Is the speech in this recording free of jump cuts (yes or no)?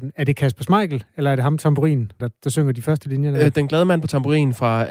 no